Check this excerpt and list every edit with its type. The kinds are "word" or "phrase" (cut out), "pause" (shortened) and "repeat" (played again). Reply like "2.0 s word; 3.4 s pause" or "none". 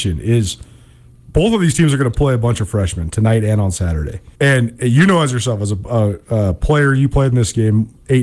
4.3 s pause